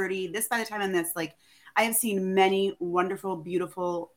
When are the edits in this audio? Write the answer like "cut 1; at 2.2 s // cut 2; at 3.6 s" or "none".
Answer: none